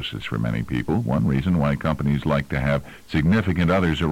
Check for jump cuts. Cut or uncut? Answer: uncut